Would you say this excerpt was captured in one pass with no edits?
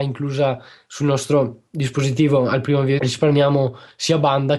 no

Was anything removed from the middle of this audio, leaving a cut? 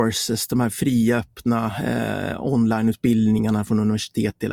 no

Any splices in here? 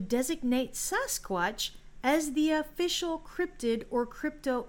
no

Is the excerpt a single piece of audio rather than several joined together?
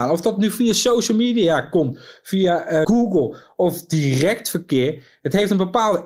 no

